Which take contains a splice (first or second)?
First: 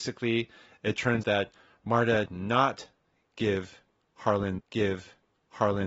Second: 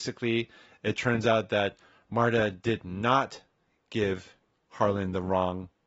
first